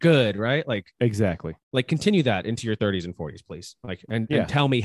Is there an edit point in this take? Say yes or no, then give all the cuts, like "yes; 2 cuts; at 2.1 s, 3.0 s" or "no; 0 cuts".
yes; 1 cut; at 1.6 s